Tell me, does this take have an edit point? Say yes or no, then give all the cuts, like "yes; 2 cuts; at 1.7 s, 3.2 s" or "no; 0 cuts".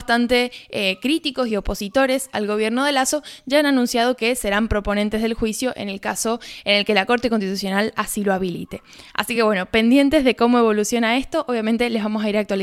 no; 0 cuts